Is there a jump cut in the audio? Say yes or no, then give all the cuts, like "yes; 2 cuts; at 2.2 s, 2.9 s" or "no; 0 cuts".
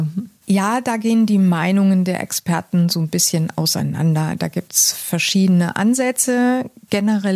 no; 0 cuts